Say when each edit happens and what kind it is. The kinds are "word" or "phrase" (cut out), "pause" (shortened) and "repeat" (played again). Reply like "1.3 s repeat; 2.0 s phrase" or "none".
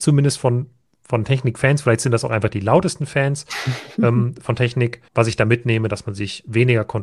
5.1 s pause